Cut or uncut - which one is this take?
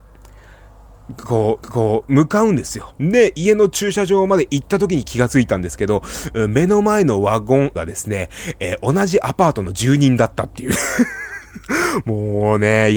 cut